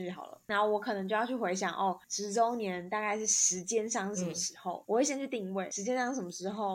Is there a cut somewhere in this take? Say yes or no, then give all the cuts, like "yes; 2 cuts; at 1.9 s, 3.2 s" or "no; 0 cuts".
yes; 1 cut; at 2.0 s